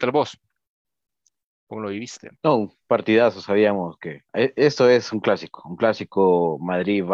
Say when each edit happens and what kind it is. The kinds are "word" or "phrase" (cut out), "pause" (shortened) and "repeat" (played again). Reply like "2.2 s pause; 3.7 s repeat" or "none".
2.4 s pause; 4.3 s pause

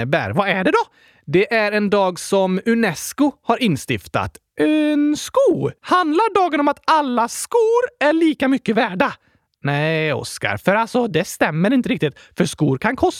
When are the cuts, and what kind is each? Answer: 5.8 s pause

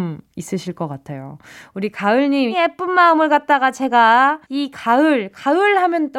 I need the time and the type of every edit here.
2.5 s word; 4.4 s pause

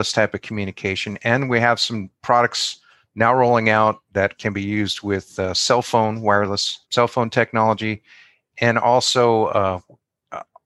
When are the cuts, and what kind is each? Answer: 2.2 s pause; 6.8 s pause

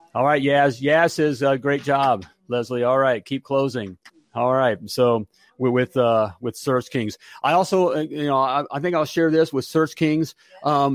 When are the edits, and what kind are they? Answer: 4.1 s pause

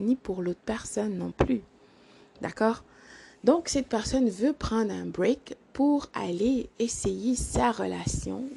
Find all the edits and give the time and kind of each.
none

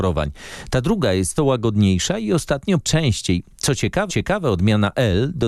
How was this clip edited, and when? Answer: 1.4 s word; 2.8 s phrase; 4.1 s repeat

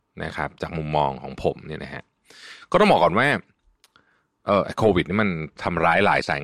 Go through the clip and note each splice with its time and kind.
none

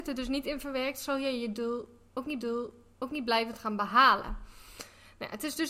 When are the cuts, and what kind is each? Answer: 2.4 s repeat

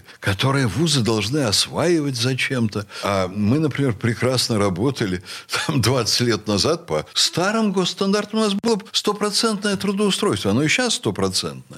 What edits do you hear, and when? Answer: none

